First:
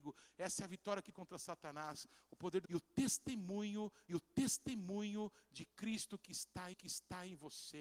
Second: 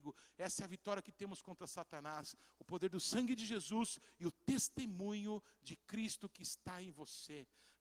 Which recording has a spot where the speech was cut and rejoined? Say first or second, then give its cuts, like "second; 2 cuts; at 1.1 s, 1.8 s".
first; 4 cuts; at 1.1 s, 2.6 s, 4.1 s, 6.7 s